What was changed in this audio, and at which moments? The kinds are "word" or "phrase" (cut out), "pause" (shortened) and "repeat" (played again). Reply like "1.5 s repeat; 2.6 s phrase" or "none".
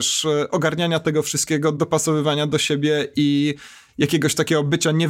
none